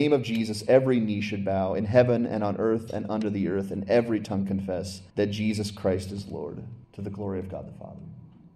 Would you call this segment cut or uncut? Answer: cut